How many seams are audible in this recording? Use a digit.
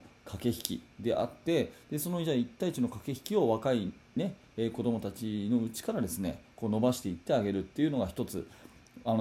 0